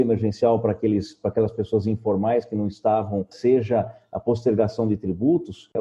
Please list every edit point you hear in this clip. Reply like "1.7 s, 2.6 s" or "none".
3.3 s